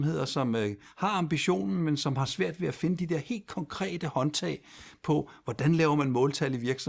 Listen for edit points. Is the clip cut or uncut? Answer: uncut